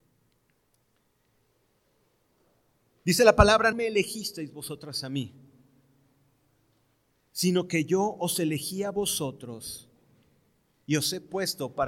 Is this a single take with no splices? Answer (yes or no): no